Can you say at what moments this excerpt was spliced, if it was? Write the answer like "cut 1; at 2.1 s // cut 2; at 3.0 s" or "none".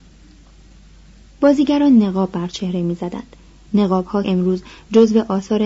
cut 1; at 4.2 s

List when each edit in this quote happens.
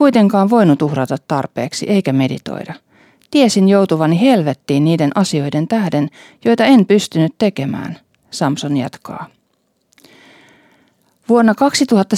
none

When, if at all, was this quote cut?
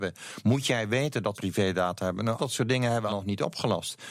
cut 1; at 1.3 s // cut 2; at 2.4 s // cut 3; at 3.1 s

